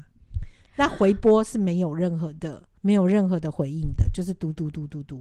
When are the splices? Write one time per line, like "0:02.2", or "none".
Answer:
0:02.8

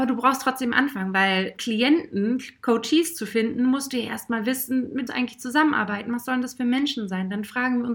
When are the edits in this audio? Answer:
0:01.6
0:05.1

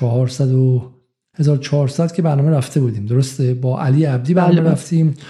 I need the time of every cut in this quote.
none

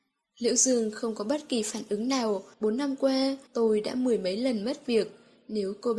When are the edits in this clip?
0:02.5
0:03.5

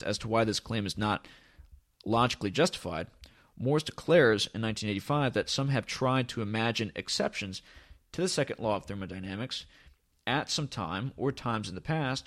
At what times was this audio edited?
none

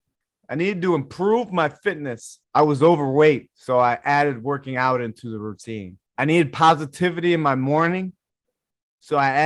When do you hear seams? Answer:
0:02.4
0:03.5
0:06.1

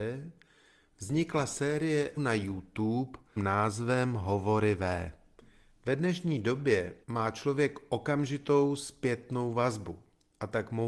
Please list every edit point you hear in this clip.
0:02.2
0:03.4
0:05.4
0:07.0

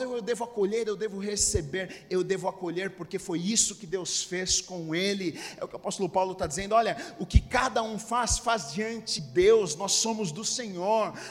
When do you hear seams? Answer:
0:09.2

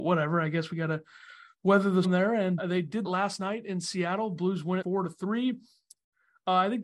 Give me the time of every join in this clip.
0:02.0
0:02.6
0:03.0
0:04.8

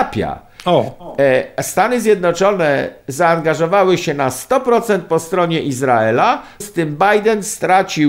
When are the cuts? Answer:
0:06.6

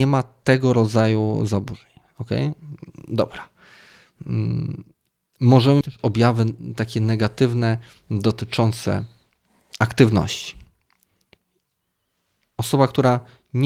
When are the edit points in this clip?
0:05.8

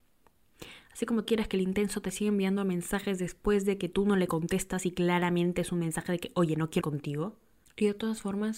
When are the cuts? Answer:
0:01.2
0:06.8

